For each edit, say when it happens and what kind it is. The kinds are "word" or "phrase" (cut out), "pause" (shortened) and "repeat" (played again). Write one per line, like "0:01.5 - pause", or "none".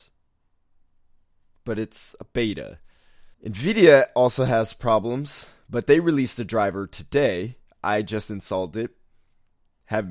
0:03.3 - pause